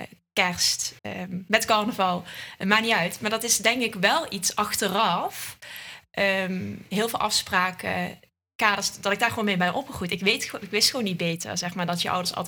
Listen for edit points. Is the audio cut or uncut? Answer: cut